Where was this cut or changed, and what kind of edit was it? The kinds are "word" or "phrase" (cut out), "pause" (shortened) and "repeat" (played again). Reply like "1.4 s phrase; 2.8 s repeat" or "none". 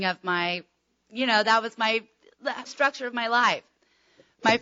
2.6 s word